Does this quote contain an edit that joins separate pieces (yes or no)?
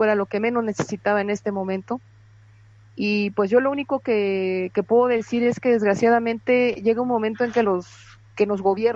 no